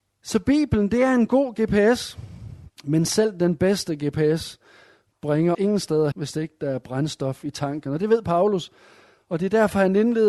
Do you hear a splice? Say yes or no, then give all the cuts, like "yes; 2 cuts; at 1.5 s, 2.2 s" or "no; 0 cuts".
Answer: yes; 3 cuts; at 2.8 s, 5.5 s, 6.1 s